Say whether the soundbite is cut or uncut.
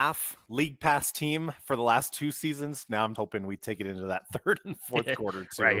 cut